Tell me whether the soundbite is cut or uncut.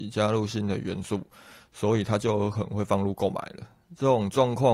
uncut